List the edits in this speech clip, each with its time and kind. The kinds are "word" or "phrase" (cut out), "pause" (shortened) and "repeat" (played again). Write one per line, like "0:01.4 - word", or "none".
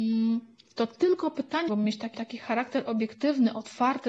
0:01.7 - word
0:02.1 - repeat